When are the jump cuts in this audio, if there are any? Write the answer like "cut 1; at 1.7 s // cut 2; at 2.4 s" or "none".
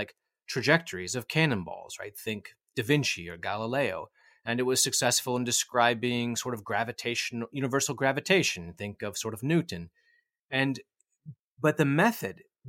none